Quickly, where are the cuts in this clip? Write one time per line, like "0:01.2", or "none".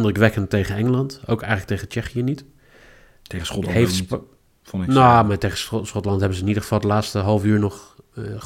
none